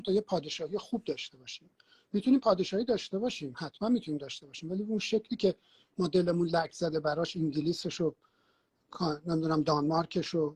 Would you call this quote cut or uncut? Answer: uncut